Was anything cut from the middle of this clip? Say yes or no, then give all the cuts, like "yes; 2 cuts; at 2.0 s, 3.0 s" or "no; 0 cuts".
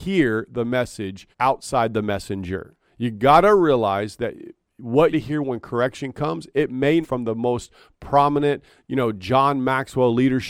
yes; 4 cuts; at 1.3 s, 2.8 s, 5.1 s, 7.0 s